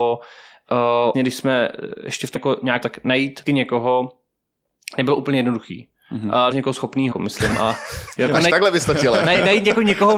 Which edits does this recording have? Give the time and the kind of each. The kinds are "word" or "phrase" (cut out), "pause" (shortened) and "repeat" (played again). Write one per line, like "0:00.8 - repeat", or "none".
0:01.1 - word
0:02.4 - word
0:02.8 - word
0:03.5 - word
0:06.5 - word
0:07.1 - word
0:08.5 - word